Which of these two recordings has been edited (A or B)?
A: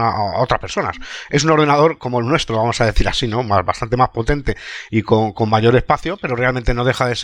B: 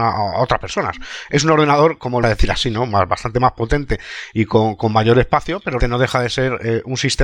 B